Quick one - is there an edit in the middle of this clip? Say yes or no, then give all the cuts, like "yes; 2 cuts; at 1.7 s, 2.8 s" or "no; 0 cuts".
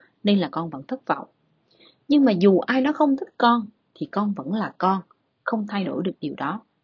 no; 0 cuts